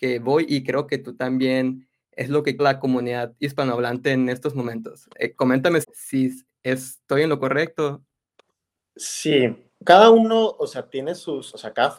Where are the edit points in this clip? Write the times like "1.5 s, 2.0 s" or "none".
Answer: 2.6 s, 5.8 s, 9.7 s